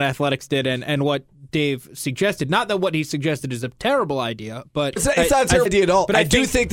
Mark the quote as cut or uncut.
cut